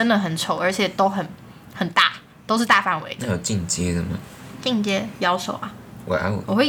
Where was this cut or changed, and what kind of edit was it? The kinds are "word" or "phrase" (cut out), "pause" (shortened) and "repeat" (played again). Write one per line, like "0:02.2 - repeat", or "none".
none